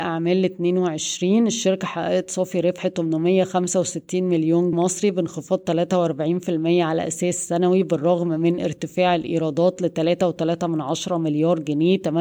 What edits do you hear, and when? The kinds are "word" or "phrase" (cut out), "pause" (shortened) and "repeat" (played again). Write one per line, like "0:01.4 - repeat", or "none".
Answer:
0:04.7 - word